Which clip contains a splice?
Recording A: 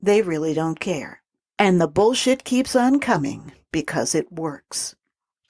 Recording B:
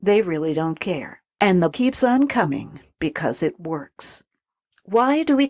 B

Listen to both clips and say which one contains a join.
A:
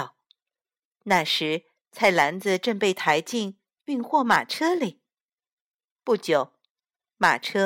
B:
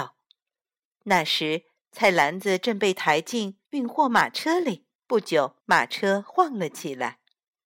B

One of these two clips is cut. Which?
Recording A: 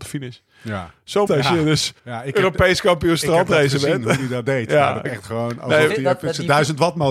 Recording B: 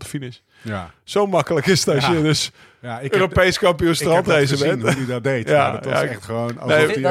A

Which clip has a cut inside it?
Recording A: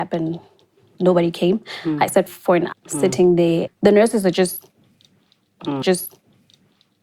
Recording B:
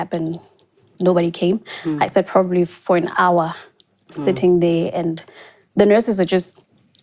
A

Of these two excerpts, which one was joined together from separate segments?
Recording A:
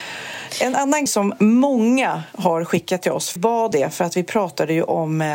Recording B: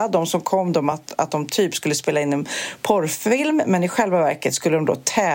A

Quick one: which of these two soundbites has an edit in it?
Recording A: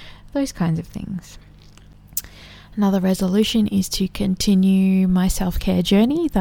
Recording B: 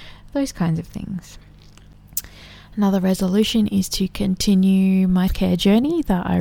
B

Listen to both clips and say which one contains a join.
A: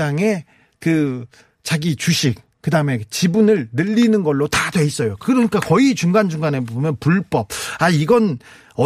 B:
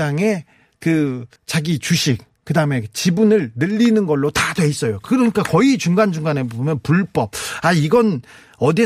B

